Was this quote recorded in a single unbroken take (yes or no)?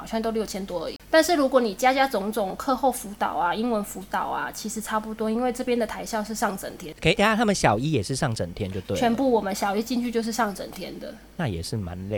no